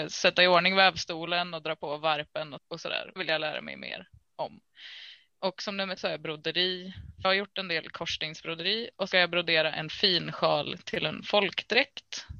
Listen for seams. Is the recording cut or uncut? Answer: cut